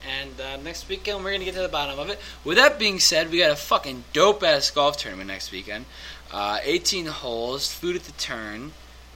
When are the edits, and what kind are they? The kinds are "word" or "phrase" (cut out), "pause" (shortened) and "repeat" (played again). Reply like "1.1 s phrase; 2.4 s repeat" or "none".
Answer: none